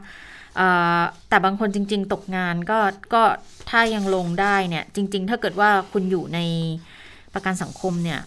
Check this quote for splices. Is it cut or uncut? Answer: uncut